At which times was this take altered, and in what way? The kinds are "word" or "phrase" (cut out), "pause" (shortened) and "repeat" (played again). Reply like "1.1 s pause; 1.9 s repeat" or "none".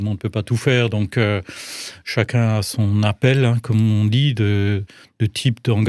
none